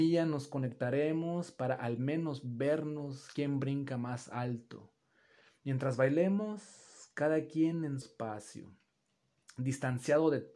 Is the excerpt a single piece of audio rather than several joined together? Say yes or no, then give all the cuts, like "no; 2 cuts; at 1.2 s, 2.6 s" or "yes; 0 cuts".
no; 1 cut; at 8.0 s